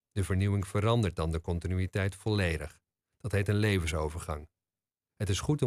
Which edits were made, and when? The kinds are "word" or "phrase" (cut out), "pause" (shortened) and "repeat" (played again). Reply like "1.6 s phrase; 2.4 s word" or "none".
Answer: none